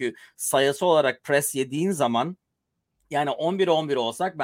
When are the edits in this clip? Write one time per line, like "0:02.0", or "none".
none